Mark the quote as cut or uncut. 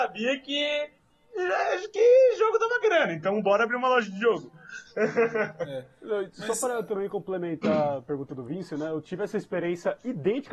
uncut